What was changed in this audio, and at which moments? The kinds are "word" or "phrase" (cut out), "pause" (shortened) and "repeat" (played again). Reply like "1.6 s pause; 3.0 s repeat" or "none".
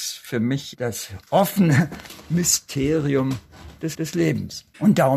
3.9 s repeat